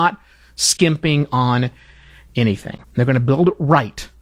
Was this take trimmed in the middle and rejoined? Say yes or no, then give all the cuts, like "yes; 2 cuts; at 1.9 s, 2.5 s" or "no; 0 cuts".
yes; 1 cut; at 2.8 s